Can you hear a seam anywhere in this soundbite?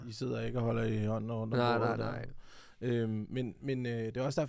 no; 0 cuts

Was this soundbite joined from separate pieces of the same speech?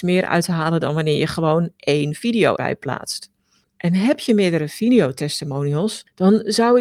yes; 1 cut; at 2.6 s

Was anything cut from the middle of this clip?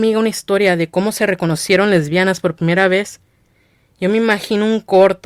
no; 0 cuts

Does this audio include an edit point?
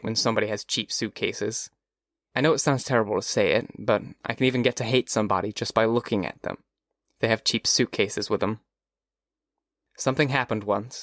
no; 0 cuts

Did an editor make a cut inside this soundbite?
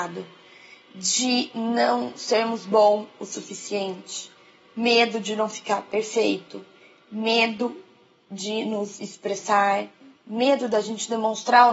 no; 0 cuts

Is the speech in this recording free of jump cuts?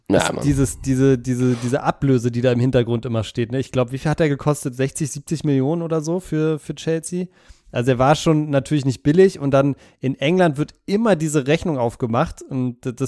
yes; 0 cuts

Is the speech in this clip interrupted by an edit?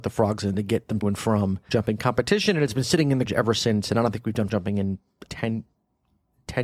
yes; 5 cuts; at 1.0 s, 1.7 s, 3.3 s, 4.5 s, 5.3 s

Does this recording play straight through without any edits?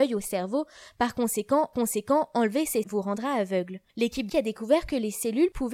no; 4 cuts; at 1.7 s, 2.8 s, 3.9 s, 4.3 s

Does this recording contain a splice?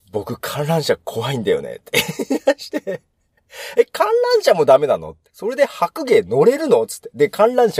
yes; 1 cut; at 5.3 s

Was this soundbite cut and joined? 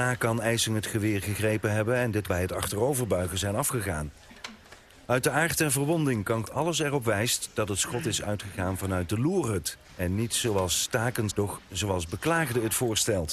yes; 5 cuts; at 2.3 s, 4.9 s, 6.4 s, 9.8 s, 11.3 s

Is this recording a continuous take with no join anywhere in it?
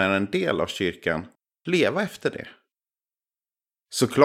yes; 0 cuts

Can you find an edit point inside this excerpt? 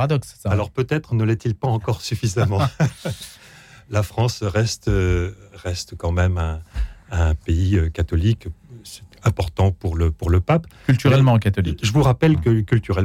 no; 0 cuts

